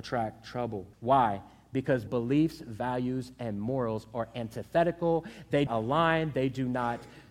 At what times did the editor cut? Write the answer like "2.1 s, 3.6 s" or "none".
0.9 s, 2.1 s, 5.7 s